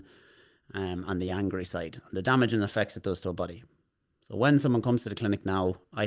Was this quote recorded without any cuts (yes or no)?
yes